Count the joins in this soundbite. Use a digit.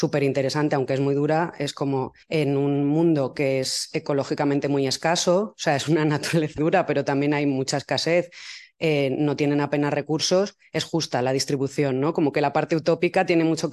2